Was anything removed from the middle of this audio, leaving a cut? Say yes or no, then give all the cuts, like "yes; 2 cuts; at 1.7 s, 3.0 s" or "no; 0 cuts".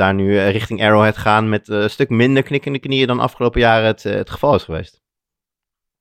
no; 0 cuts